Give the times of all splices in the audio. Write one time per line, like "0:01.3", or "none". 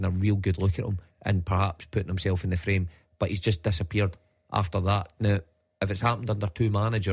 none